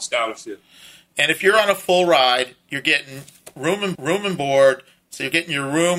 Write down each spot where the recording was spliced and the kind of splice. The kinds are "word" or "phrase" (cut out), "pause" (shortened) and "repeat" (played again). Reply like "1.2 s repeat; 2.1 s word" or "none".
3.9 s repeat